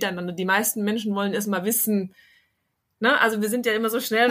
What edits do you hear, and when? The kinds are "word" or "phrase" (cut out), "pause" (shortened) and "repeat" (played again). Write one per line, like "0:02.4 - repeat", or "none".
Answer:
none